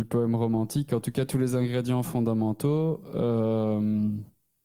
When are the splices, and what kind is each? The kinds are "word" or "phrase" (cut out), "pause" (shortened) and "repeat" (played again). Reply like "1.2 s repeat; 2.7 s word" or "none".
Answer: none